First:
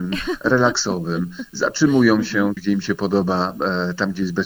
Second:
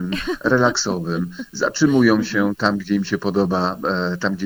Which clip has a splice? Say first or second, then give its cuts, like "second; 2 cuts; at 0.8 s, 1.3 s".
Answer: first; 1 cut; at 2.6 s